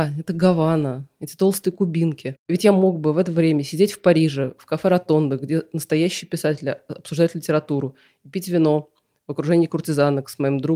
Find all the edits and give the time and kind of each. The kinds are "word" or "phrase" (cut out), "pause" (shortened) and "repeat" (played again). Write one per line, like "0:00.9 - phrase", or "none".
none